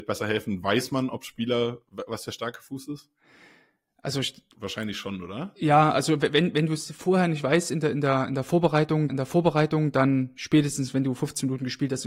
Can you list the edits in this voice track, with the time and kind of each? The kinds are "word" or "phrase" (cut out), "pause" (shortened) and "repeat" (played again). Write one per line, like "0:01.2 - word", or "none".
0:04.5 - pause
0:09.1 - repeat